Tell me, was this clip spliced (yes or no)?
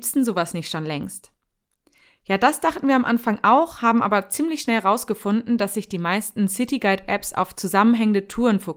no